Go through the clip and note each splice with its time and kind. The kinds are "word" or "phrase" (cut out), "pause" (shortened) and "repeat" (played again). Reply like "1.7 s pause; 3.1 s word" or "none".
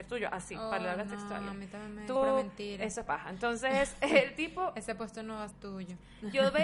2.2 s word; 3.1 s word; 5.5 s word

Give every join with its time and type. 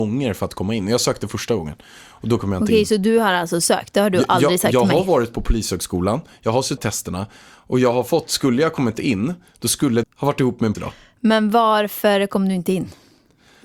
6.8 s phrase; 10.0 s word; 10.7 s word

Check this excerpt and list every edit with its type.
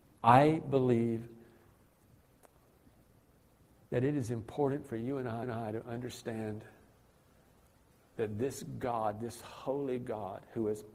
5.4 s repeat

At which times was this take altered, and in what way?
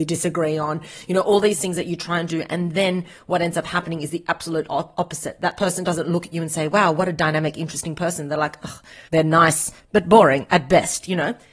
9.1 s pause

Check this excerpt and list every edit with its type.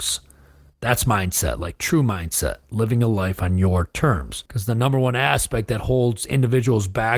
4.5 s pause

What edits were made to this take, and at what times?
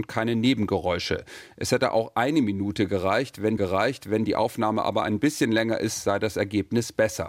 3.6 s repeat

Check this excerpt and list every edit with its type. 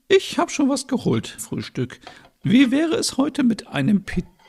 1.4 s word

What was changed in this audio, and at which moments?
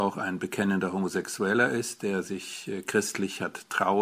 none

